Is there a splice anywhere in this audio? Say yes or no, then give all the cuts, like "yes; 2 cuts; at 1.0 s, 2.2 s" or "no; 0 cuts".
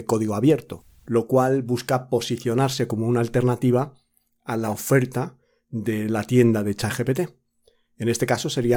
no; 0 cuts